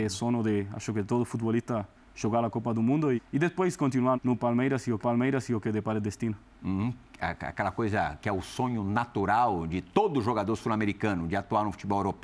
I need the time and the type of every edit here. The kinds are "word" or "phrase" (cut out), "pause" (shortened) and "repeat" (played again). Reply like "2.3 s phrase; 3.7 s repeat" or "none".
3.2 s word; 4.1 s word; 5.0 s repeat

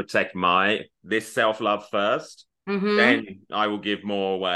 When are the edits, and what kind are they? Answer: 1.0 s word

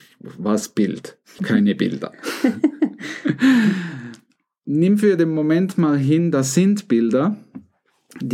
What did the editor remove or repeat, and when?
1.4 s word

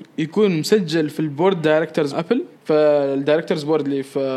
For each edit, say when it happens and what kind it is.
2.1 s word; 2.6 s pause

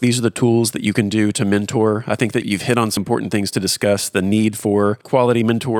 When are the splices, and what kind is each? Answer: 2.4 s word; 3.0 s word

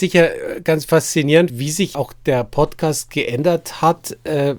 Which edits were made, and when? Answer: 1.5 s word; 1.9 s word

